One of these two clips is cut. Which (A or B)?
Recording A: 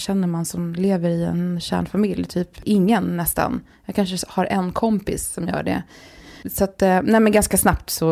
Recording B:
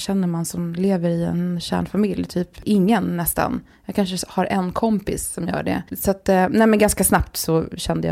B